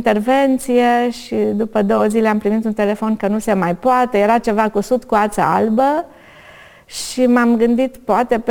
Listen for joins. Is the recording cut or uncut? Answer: uncut